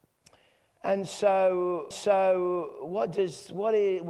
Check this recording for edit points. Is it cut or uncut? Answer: cut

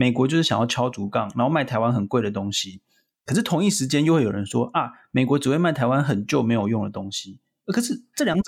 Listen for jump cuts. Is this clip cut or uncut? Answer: uncut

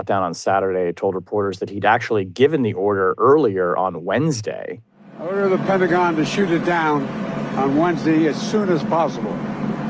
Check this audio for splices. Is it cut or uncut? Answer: uncut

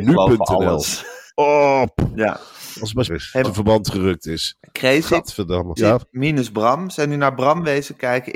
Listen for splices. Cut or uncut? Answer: cut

